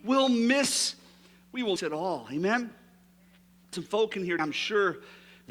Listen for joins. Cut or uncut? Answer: cut